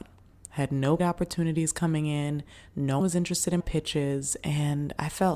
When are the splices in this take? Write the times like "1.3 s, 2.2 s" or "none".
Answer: 1.0 s, 3.0 s, 3.6 s